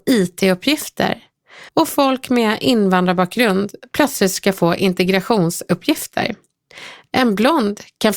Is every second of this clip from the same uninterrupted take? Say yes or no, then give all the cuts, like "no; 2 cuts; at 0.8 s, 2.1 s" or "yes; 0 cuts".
no; 1 cut; at 1.7 s